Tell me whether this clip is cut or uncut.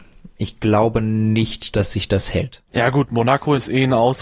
cut